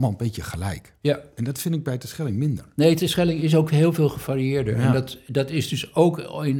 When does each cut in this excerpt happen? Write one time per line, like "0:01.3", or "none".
none